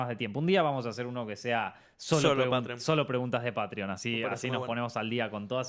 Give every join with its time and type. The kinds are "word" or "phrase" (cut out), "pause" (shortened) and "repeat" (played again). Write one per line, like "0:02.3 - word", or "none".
none